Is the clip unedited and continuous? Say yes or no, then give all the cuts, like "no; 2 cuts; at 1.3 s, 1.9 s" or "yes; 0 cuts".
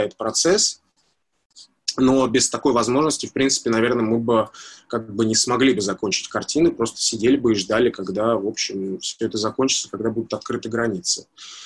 yes; 0 cuts